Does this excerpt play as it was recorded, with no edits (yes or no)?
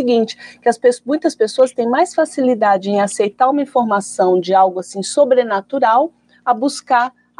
yes